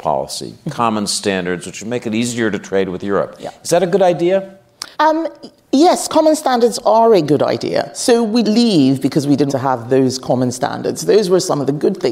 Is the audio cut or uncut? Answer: cut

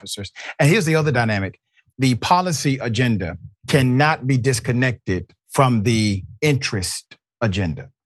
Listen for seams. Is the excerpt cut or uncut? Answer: cut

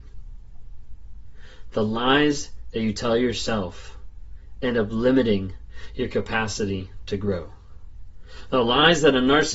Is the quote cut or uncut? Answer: uncut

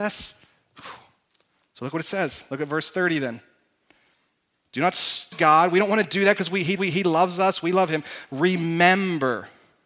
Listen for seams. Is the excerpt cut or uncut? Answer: cut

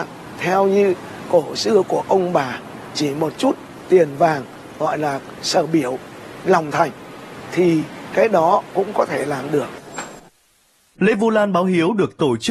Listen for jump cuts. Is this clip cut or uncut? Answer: uncut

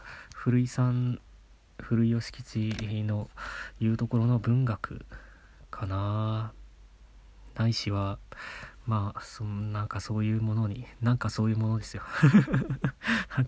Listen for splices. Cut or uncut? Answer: uncut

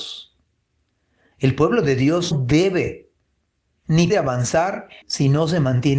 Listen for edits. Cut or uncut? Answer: cut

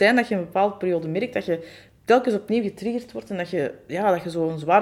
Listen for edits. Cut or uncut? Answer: uncut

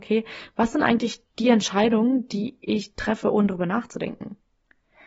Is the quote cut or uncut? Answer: uncut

